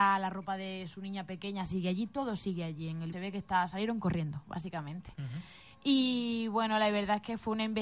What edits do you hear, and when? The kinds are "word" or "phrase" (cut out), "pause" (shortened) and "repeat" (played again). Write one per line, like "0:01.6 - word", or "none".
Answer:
0:03.1 - phrase